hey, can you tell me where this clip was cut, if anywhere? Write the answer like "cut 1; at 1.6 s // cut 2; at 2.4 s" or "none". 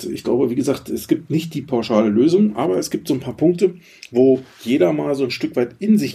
none